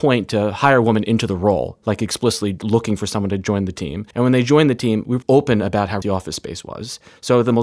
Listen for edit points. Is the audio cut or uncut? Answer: cut